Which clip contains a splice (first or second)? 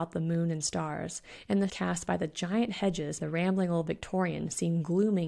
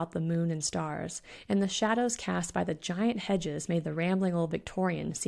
first